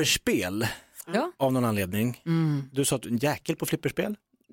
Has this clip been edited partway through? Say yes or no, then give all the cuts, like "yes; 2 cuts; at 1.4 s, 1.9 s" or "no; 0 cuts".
yes; 1 cut; at 3.0 s